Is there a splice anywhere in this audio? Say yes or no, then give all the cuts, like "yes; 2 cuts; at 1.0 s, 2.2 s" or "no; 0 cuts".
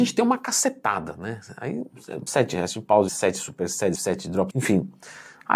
yes; 4 cuts; at 2.3 s, 3.1 s, 3.9 s, 4.5 s